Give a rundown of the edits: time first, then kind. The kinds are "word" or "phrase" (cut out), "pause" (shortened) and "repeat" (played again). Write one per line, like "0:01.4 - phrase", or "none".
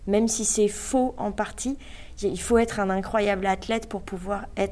none